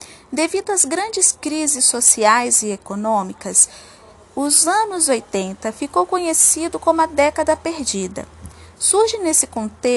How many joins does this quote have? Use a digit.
0